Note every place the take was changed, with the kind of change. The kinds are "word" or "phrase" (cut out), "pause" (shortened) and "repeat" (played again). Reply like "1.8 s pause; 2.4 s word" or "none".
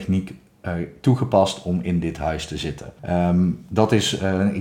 3.0 s pause